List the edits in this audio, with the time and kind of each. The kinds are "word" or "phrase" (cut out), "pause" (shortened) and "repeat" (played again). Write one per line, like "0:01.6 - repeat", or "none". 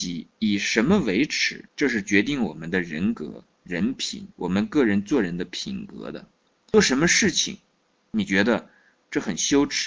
0:01.7 - pause
0:04.3 - pause